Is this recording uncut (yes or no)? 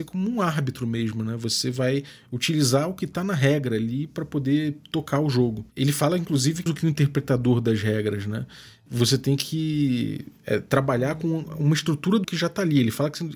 no